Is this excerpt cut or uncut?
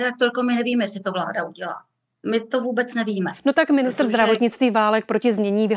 uncut